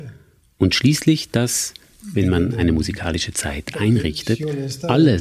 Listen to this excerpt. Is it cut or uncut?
uncut